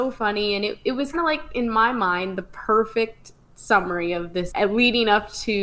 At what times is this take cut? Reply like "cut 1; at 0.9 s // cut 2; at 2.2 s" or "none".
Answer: cut 1; at 1.1 s // cut 2; at 3.4 s // cut 3; at 4.5 s